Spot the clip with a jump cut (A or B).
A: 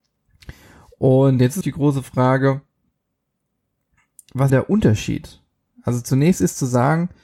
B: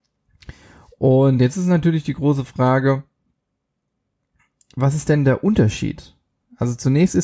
A